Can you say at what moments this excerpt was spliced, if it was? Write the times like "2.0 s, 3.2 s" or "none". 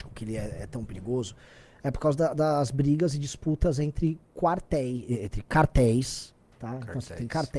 none